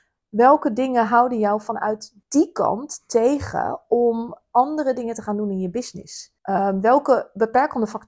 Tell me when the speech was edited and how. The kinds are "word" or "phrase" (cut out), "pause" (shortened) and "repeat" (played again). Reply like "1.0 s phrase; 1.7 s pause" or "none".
2.2 s pause; 6.4 s pause